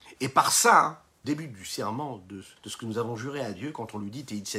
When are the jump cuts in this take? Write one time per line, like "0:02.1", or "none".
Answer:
0:01.2
0:02.6